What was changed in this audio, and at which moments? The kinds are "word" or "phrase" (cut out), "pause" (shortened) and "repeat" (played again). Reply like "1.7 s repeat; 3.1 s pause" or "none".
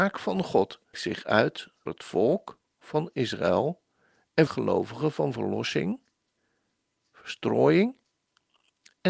0.9 s word; 1.9 s word; 4.5 s phrase